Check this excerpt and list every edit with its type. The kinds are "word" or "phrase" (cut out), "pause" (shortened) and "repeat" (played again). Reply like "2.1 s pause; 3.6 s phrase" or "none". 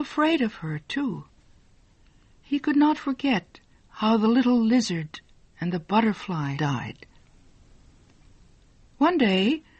6.6 s word